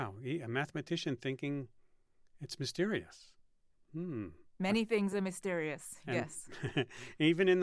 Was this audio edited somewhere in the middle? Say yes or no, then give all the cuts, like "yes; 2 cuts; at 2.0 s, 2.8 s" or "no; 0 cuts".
no; 0 cuts